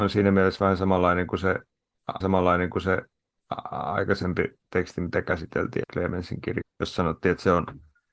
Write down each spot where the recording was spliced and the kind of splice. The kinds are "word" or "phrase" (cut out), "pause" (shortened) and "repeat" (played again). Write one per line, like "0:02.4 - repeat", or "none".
0:02.2 - repeat
0:05.8 - word
0:06.6 - word